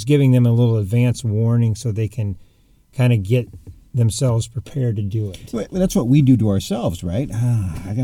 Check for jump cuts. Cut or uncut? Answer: uncut